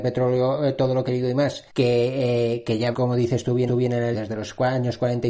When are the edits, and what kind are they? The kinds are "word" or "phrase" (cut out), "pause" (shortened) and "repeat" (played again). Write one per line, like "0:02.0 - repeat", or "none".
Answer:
0:01.1 - word
0:01.7 - pause
0:02.9 - word
0:03.7 - repeat
0:04.1 - word